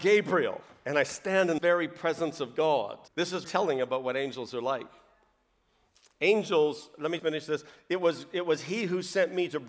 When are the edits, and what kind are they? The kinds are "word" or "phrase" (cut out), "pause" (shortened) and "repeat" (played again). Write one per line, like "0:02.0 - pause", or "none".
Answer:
0:01.6 - word
0:03.1 - pause
0:03.4 - word
0:07.2 - word